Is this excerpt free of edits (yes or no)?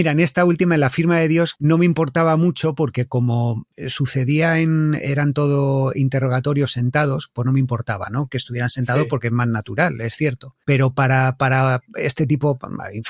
yes